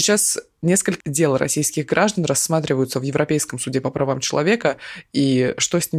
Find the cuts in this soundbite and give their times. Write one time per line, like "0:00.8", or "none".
0:01.0